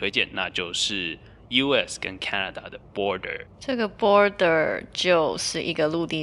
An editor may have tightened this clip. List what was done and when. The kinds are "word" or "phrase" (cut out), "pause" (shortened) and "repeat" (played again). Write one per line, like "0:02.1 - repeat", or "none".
none